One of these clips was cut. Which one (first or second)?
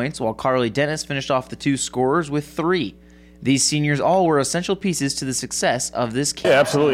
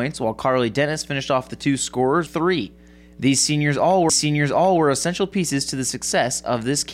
second